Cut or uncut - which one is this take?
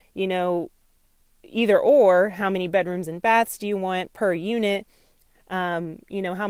uncut